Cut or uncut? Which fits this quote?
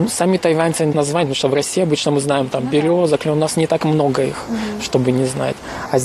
cut